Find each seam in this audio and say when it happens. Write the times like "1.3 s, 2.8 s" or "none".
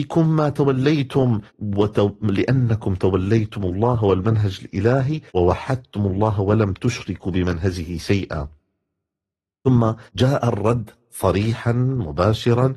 1.5 s, 5.3 s, 10.1 s

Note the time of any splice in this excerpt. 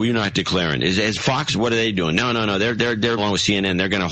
3.2 s

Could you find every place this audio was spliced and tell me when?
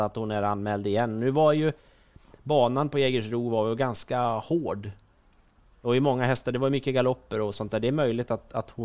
none

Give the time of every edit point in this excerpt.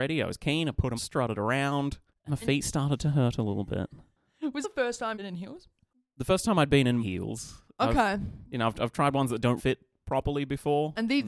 1.0 s, 2.3 s, 4.6 s, 5.1 s, 7.0 s, 9.6 s

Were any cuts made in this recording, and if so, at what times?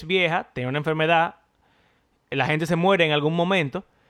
none

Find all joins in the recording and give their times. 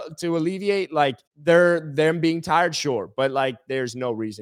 1.3 s

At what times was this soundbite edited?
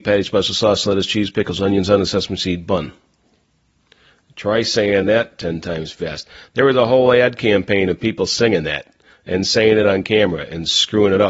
none

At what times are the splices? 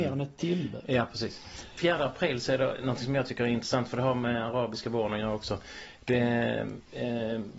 none

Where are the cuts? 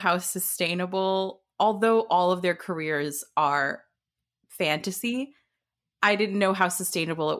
none

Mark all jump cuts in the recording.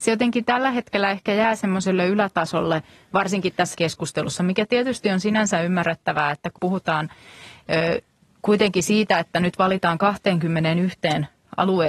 3.7 s, 6.6 s

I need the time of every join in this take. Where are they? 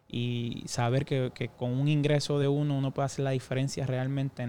none

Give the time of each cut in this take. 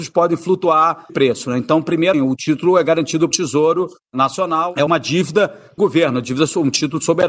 1.1 s, 2.1 s, 3.3 s, 4.9 s, 5.8 s

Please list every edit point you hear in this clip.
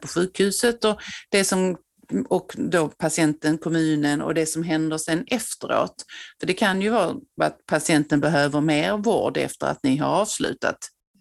none

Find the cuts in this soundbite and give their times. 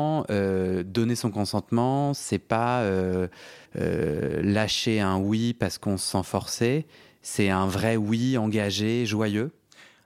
3.6 s

